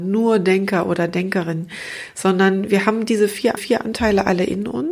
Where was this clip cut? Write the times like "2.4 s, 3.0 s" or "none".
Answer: 3.6 s